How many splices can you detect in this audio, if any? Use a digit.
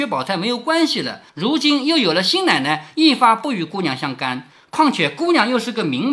1